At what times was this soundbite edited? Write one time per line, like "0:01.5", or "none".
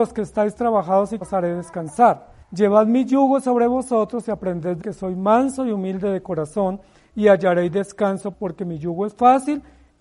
0:01.2
0:02.4
0:04.8
0:08.3